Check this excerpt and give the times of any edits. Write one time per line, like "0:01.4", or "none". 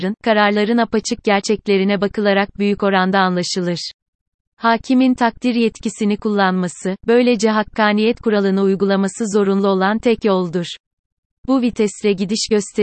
none